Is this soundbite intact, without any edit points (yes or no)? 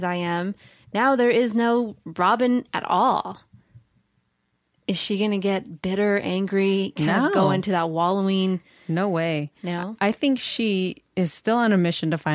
yes